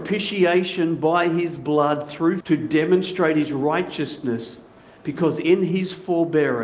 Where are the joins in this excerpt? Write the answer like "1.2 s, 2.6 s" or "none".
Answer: 2.4 s